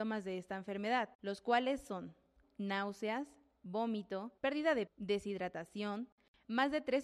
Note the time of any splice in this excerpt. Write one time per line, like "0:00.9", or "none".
0:01.1
0:02.4
0:04.4
0:04.9